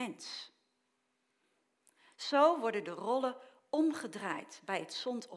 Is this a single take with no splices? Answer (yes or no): yes